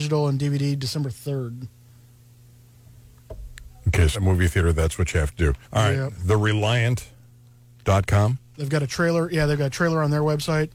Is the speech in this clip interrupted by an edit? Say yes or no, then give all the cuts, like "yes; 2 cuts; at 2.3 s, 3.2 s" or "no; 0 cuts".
yes; 2 cuts; at 4.1 s, 5.6 s